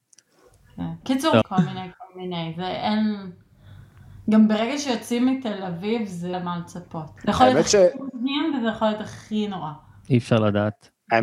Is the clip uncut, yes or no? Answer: no